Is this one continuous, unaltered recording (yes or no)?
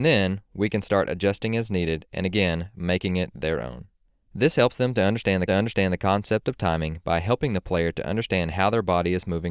no